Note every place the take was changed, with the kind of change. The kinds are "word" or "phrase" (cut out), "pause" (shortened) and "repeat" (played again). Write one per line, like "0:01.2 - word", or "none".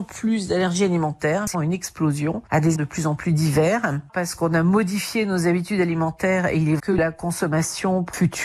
0:01.5 - word
0:02.7 - word
0:06.8 - word